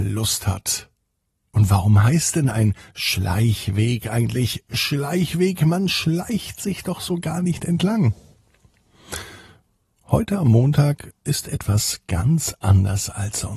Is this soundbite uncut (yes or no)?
yes